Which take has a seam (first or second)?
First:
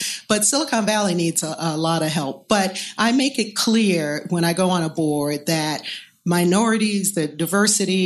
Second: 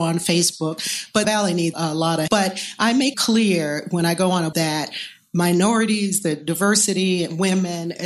second